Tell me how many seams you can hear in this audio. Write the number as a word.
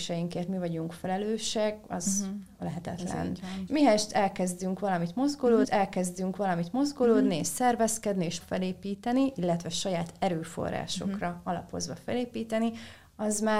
three